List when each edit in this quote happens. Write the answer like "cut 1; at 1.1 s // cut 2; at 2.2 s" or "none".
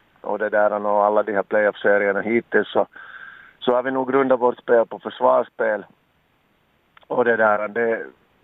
none